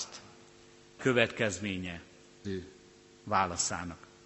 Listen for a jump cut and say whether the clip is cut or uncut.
cut